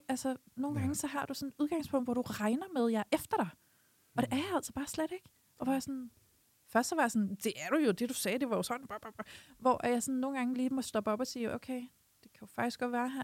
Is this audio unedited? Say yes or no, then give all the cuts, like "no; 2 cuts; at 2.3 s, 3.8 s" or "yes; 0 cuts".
yes; 0 cuts